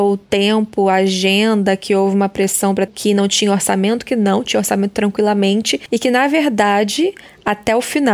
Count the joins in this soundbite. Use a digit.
1